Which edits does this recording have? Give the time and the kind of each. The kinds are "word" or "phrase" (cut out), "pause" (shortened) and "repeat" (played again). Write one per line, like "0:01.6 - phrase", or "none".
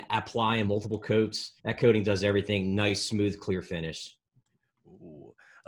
0:01.6 - pause